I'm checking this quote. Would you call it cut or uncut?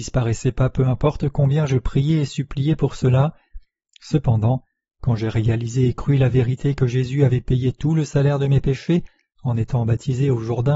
uncut